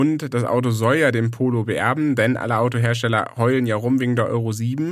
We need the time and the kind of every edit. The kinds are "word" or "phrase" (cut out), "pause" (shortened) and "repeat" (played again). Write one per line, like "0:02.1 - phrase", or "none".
none